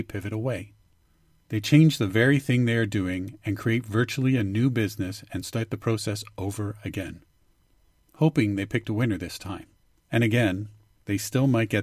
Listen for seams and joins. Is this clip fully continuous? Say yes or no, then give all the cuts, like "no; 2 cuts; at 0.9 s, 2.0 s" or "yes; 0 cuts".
yes; 0 cuts